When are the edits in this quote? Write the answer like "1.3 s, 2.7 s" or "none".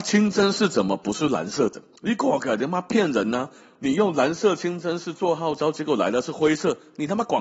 2.0 s